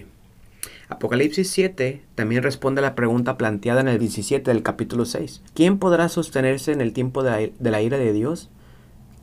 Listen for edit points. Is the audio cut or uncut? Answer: cut